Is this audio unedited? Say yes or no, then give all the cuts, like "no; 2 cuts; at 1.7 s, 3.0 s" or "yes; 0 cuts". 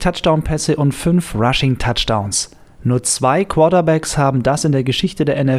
no; 1 cut; at 2.7 s